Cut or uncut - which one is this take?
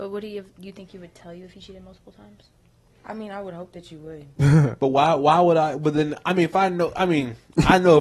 cut